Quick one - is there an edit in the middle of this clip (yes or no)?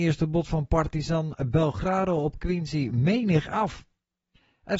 no